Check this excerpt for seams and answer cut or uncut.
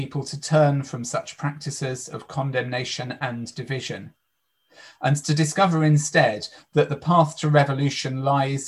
uncut